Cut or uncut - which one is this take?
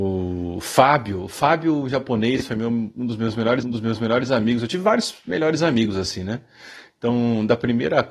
cut